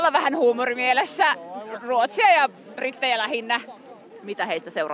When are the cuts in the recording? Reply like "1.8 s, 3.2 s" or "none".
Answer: none

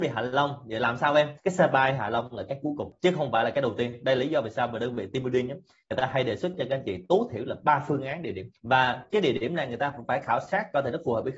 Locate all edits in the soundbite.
none

